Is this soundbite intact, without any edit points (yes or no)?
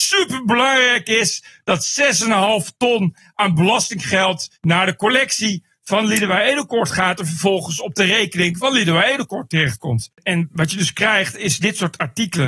no